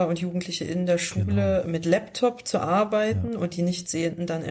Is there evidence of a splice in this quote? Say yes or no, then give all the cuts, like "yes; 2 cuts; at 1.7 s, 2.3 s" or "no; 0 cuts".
no; 0 cuts